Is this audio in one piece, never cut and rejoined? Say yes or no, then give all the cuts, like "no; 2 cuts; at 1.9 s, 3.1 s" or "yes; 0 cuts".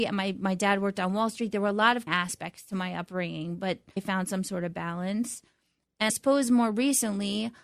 no; 3 cuts; at 2.1 s, 4.0 s, 6.1 s